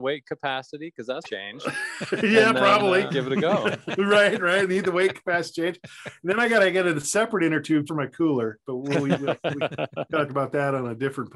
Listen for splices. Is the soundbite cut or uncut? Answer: cut